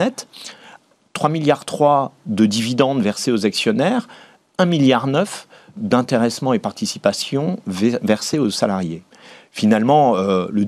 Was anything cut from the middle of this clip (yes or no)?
no